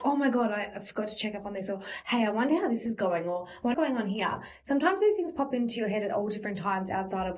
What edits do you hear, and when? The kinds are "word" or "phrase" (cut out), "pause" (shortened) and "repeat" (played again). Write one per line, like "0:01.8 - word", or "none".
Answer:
0:03.7 - word